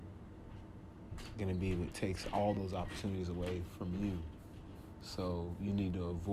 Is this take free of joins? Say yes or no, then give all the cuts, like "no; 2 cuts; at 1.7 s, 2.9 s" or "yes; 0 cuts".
yes; 0 cuts